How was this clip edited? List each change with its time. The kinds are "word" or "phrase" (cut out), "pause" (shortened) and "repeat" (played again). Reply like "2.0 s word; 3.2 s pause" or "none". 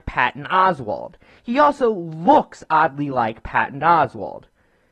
none